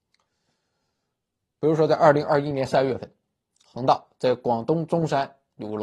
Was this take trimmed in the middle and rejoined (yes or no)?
yes